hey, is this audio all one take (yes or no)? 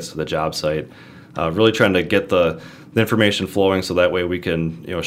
yes